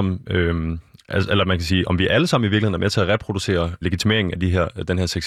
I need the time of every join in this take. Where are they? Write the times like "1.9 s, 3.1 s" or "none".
3.8 s